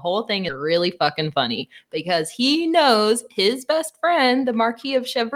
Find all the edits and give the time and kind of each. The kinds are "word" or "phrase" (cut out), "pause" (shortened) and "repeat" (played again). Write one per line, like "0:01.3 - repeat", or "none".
none